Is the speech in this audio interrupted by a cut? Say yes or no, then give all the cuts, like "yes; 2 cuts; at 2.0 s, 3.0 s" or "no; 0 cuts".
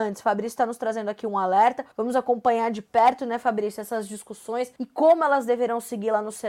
yes; 2 cuts; at 1.9 s, 4.8 s